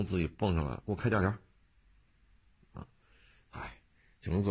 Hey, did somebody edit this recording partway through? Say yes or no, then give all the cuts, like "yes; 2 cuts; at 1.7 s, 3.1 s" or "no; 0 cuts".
no; 0 cuts